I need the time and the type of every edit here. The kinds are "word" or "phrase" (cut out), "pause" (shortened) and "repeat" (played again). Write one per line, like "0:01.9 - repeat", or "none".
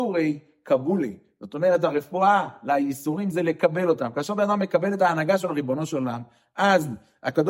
none